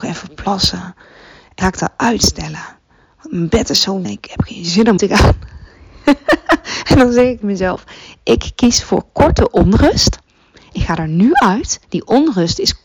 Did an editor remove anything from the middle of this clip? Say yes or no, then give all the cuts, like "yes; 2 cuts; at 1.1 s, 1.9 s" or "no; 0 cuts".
yes; 5 cuts; at 1.6 s, 4.0 s, 5.0 s, 7.4 s, 11.8 s